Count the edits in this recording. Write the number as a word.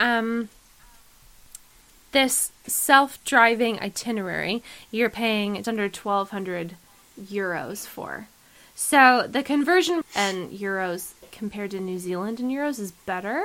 two